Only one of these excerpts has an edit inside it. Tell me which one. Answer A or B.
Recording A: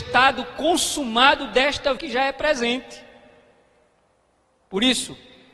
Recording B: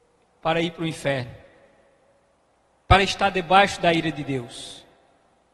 A